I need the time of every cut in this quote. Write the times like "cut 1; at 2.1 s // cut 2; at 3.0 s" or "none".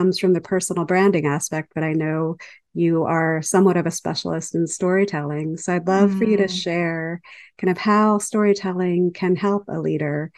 none